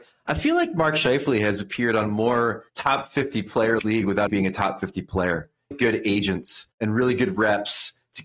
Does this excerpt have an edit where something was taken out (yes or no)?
yes